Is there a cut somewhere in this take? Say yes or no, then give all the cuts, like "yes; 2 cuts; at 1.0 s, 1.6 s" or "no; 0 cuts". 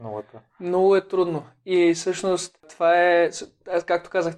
yes; 1 cut; at 2.6 s